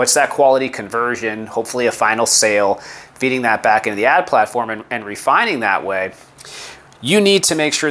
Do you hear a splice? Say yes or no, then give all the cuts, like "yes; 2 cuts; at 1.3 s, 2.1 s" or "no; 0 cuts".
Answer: no; 0 cuts